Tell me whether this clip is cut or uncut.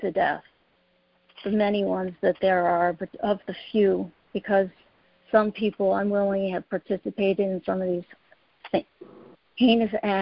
uncut